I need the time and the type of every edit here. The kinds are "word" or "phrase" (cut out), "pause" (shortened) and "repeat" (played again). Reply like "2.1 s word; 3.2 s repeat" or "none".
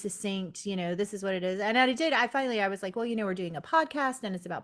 none